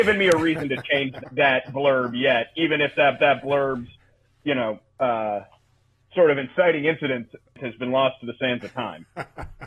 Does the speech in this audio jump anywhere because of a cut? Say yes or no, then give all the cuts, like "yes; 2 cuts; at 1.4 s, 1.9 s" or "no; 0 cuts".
yes; 2 cuts; at 1.2 s, 3.2 s